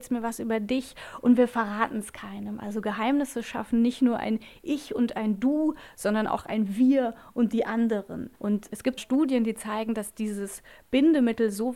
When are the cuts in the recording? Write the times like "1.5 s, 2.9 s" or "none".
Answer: 8.4 s, 9.0 s